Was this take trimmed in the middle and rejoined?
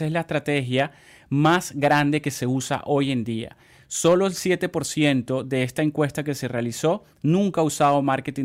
no; 0 cuts

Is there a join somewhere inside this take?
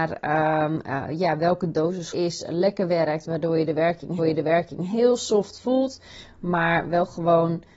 yes; 2 cuts; at 2.1 s, 4.2 s

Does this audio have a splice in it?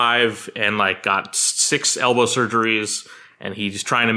no; 0 cuts

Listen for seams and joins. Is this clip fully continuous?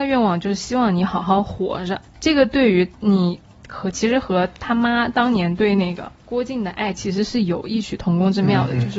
no; 3 cuts; at 2.1 s, 2.9 s, 6.1 s

